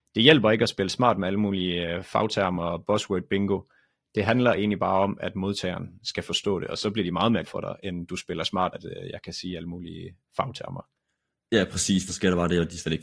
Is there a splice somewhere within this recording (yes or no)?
yes